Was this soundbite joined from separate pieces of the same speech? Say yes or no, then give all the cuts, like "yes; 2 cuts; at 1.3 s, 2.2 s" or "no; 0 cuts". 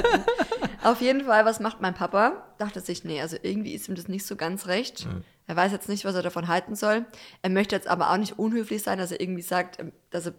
no; 0 cuts